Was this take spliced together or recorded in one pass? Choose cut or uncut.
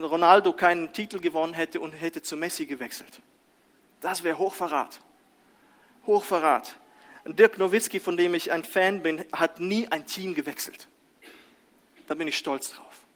uncut